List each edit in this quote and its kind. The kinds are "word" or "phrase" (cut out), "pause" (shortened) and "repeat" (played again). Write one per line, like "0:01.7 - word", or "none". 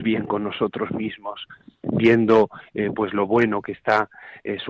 none